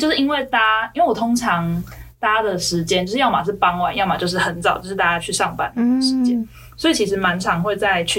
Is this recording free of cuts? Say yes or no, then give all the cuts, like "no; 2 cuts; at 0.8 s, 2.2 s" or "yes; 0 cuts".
yes; 0 cuts